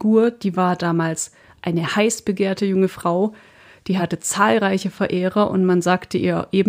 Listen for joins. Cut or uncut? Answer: uncut